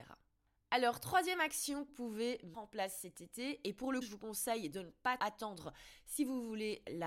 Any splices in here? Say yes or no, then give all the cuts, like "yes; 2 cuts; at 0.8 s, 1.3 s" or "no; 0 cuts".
yes; 4 cuts; at 1.9 s, 2.5 s, 4.0 s, 5.2 s